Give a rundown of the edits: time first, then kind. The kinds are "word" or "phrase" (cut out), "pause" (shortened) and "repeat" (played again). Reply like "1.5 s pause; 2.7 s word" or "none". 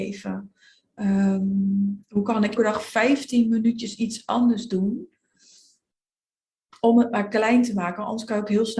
2.6 s word